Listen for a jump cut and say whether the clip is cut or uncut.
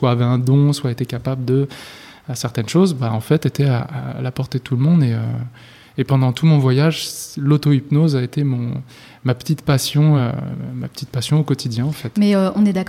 uncut